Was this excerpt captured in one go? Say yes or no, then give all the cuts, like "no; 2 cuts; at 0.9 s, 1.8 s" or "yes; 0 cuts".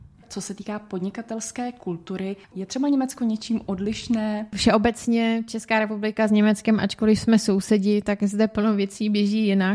no; 1 cut; at 2.4 s